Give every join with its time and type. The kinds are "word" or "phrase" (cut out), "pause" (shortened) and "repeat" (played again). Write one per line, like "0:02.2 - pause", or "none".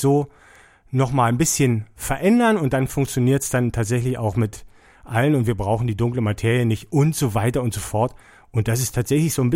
none